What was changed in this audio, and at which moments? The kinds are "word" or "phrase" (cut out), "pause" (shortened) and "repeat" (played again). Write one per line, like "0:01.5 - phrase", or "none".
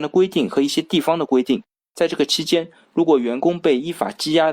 none